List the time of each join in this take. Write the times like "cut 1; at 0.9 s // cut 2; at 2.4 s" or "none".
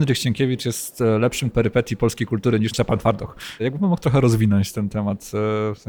cut 1; at 1.5 s // cut 2; at 2.7 s